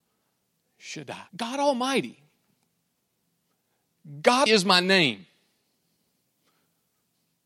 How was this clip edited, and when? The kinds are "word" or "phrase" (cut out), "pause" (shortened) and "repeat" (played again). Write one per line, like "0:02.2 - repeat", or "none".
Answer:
0:01.3 - pause
0:04.5 - word